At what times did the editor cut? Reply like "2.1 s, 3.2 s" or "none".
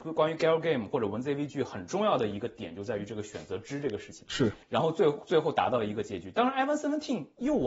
4.6 s